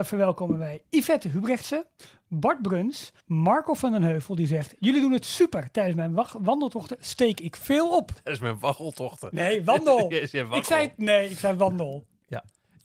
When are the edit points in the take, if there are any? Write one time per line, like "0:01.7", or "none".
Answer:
0:03.2